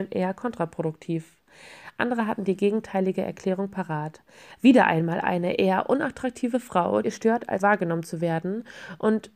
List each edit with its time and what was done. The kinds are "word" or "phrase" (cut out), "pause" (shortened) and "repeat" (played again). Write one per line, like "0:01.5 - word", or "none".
0:07.0 - word
0:07.6 - word

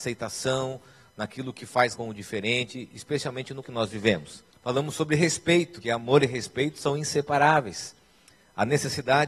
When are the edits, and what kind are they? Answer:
0:01.9 - phrase
0:03.6 - word
0:04.5 - pause
0:05.8 - word

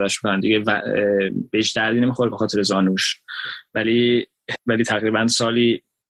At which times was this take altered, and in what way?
0:04.5 - word

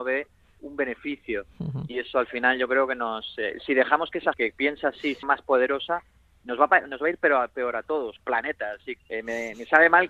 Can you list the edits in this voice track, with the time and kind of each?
0:04.3 - word
0:05.2 - word
0:08.2 - word
0:09.0 - word

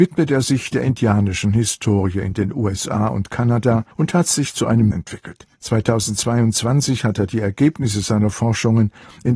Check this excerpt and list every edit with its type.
0:03.9 - pause
0:04.9 - phrase
0:05.6 - pause

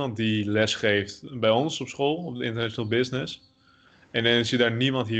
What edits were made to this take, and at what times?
none

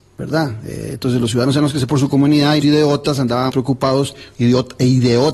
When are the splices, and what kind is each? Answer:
0:01.9 - word
0:02.6 - word
0:03.5 - word

